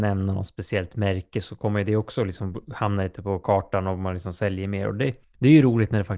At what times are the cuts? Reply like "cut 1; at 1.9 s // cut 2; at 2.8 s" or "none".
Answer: cut 1; at 5.2 s